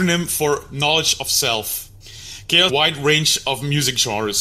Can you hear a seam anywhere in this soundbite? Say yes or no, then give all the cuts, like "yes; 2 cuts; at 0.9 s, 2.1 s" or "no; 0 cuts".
yes; 1 cut; at 2.7 s